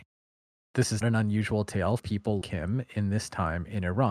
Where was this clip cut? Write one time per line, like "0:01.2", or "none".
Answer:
0:01.0
0:02.0
0:02.4